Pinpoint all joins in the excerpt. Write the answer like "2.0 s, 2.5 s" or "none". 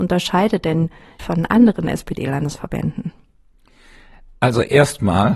1.2 s